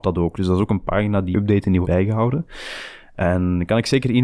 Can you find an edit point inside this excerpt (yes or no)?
yes